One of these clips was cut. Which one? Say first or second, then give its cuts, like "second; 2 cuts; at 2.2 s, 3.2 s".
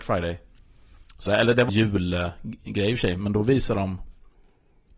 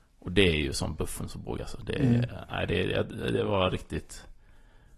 first; 2 cuts; at 1.3 s, 1.7 s